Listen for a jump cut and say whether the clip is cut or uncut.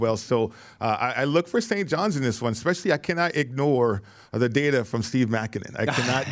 uncut